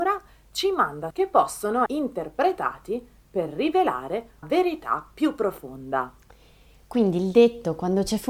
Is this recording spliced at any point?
yes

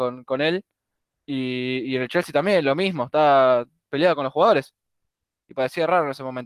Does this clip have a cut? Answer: no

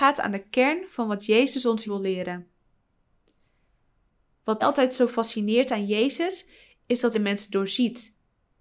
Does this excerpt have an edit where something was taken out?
yes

